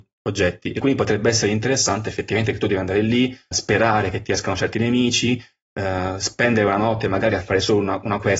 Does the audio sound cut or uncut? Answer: cut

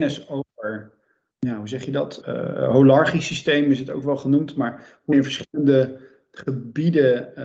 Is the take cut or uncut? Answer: cut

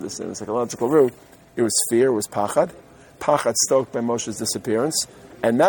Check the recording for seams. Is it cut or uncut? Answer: uncut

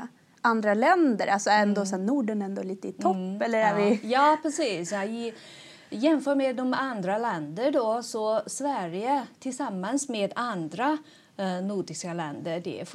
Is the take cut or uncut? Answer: uncut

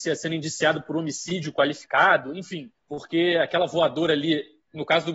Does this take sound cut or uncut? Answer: cut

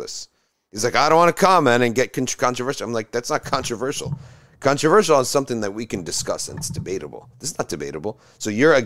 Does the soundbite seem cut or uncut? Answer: uncut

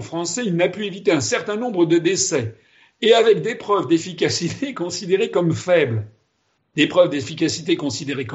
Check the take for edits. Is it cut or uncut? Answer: uncut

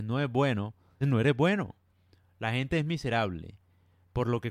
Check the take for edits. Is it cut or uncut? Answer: cut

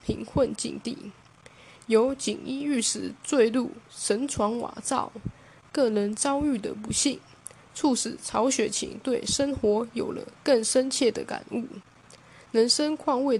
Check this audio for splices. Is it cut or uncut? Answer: uncut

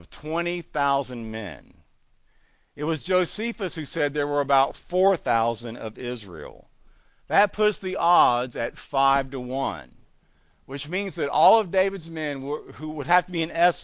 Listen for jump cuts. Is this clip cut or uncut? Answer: uncut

